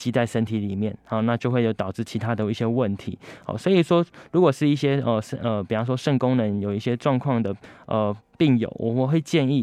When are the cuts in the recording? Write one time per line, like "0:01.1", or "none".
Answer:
none